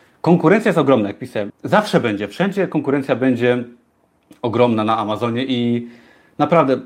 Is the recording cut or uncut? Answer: cut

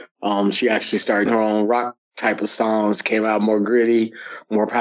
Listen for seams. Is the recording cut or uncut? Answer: cut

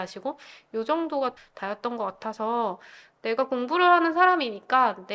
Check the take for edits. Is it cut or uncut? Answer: cut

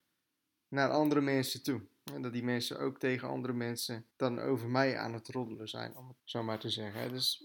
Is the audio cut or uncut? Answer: cut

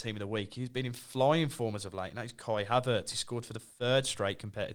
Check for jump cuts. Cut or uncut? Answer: uncut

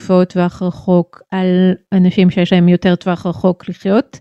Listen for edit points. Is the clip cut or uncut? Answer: uncut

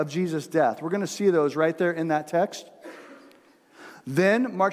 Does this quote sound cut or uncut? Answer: uncut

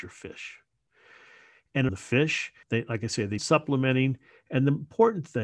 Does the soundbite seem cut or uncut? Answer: cut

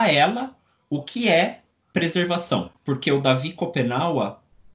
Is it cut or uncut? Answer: cut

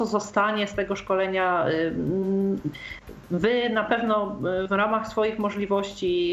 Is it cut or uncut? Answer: uncut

